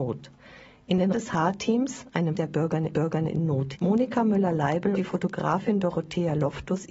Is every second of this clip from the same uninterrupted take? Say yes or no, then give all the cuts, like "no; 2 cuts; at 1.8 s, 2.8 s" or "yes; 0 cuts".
no; 5 cuts; at 1.1 s, 2.4 s, 2.9 s, 3.8 s, 5.0 s